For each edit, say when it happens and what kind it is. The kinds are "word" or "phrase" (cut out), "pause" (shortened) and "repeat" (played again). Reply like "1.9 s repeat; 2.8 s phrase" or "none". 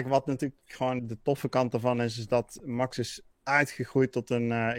1.0 s word; 3.3 s pause